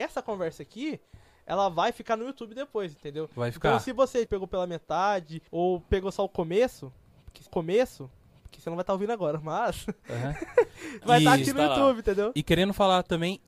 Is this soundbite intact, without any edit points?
no; 3 cuts; at 4.3 s, 5.5 s, 7.5 s

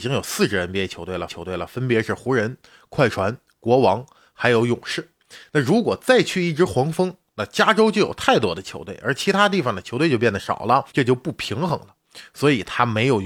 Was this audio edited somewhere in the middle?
yes; 2 cuts; at 1.3 s, 10.9 s

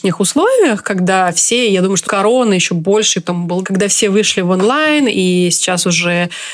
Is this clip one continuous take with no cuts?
no; 3 cuts; at 2.0 s, 3.2 s, 3.6 s

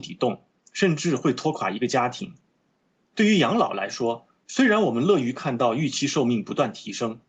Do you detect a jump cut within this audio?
no; 0 cuts

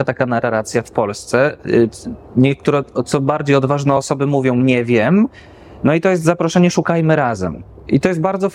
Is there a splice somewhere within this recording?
no; 0 cuts

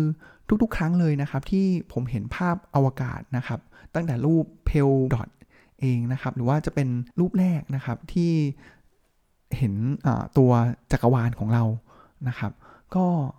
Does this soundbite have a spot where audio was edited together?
yes; 2 cuts; at 5.1 s, 7.1 s

